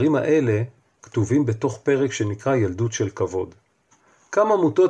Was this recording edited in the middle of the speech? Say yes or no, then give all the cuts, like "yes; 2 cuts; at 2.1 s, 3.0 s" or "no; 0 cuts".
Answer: no; 0 cuts